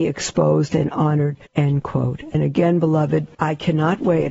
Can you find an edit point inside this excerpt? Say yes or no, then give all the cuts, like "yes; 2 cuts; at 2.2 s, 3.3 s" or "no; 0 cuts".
yes; 2 cuts; at 1.5 s, 3.3 s